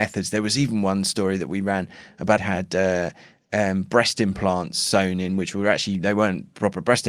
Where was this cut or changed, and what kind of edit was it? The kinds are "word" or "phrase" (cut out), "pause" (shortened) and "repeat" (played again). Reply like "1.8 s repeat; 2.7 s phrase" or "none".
2.4 s phrase